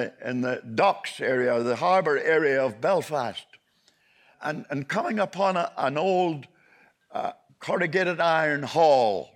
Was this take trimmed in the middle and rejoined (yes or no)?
yes